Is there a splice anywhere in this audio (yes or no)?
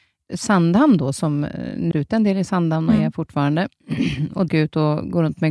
yes